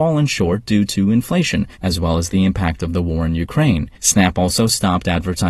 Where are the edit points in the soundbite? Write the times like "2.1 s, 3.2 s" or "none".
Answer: 1.7 s, 3.9 s